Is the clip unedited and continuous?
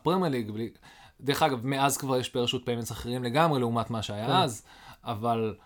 yes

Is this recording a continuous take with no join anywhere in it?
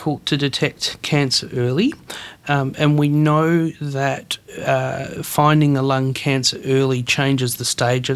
yes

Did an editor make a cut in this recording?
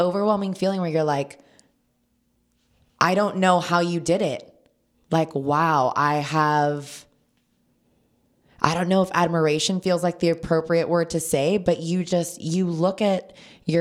no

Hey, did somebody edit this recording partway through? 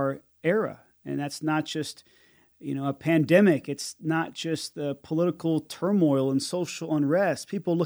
no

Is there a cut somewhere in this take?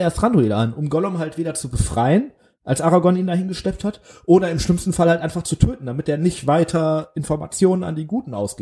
no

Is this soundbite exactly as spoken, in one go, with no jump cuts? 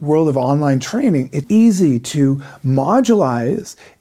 no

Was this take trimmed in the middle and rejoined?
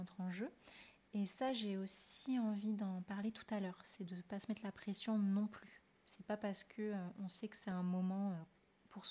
no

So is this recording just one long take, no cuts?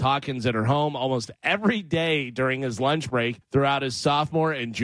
no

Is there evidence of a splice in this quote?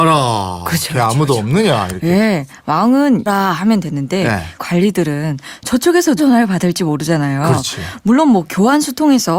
yes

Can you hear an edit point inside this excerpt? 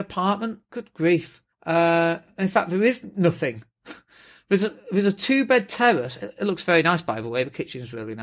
yes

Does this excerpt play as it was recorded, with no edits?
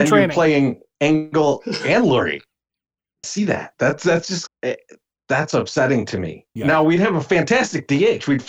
no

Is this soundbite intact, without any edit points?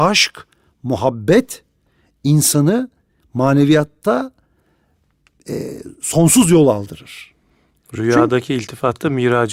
yes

